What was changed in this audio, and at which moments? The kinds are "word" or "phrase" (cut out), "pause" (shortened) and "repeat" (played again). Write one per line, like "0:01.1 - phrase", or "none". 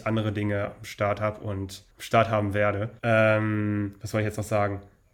0:01.9 - pause
0:03.0 - pause